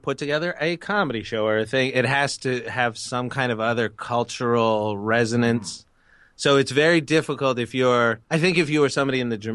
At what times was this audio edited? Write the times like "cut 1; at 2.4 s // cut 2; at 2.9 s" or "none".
cut 1; at 8.2 s